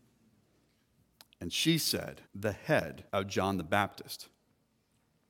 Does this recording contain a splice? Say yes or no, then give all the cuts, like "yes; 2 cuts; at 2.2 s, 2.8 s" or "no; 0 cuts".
yes; 2 cuts; at 2.3 s, 3.1 s